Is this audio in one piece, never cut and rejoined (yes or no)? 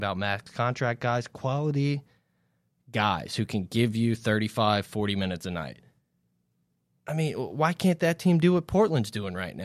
yes